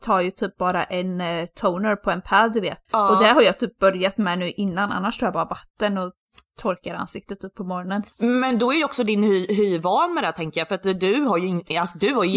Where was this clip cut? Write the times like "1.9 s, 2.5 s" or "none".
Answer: 2.9 s, 8.1 s